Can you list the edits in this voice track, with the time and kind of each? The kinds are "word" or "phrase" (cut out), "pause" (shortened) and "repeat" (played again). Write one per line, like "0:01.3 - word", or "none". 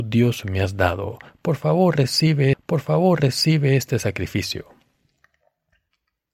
0:02.5 - repeat